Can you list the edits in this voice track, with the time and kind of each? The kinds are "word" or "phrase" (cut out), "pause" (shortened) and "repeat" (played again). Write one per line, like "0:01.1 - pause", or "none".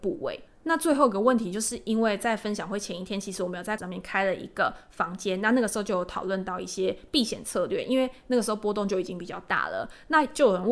0:03.8 - word